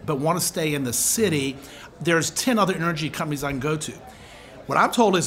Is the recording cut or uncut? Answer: uncut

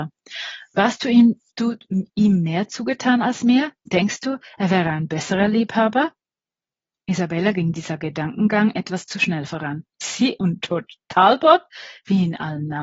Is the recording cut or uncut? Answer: cut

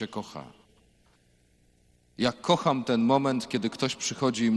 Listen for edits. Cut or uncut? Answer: uncut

